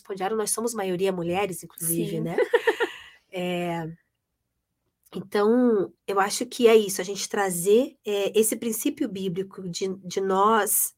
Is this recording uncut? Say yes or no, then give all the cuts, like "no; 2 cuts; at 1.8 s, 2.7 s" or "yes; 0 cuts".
no; 2 cuts; at 6.0 s, 8.0 s